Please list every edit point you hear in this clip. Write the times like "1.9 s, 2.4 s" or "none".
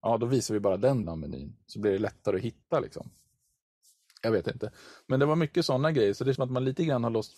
1.0 s, 6.3 s

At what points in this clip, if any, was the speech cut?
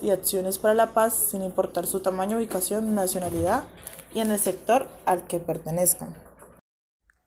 none

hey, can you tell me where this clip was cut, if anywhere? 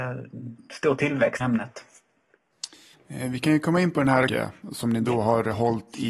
1.4 s, 2.9 s, 4.3 s

